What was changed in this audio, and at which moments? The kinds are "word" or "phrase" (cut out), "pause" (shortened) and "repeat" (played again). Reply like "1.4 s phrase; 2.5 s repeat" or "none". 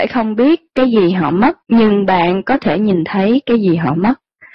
1.6 s pause